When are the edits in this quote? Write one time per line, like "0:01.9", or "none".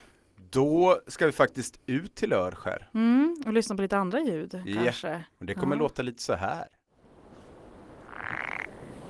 0:05.3